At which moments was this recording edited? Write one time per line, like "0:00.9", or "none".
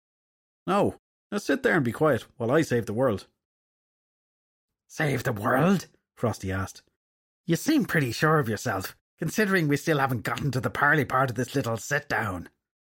0:09.1